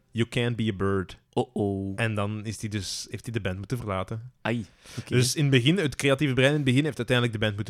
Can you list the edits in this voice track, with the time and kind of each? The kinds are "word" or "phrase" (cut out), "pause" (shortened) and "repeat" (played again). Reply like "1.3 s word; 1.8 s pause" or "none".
1.3 s pause